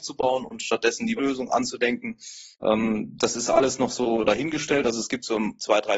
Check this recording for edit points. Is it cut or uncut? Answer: cut